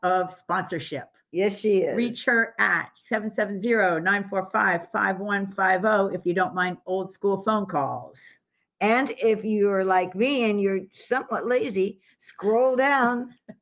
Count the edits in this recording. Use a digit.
0